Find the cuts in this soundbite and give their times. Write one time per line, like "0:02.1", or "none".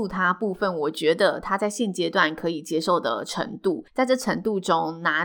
0:03.9